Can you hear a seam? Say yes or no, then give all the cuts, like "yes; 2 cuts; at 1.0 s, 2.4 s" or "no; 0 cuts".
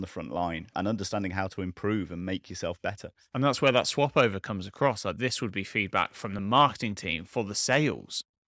no; 0 cuts